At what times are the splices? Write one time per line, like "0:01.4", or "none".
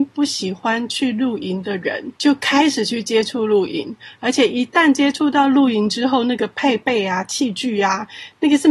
0:02.2